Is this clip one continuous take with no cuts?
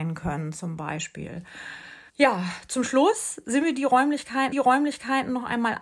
no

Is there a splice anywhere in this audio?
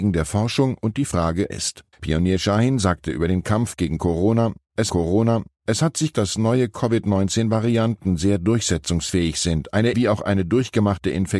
yes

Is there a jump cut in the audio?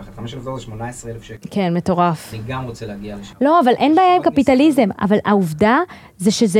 no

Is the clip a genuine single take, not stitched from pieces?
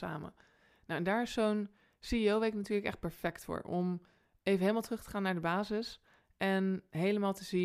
yes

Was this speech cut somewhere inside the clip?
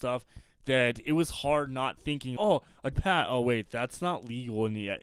yes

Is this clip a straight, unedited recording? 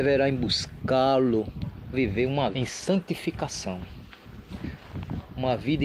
no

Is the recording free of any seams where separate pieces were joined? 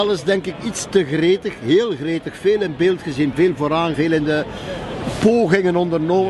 no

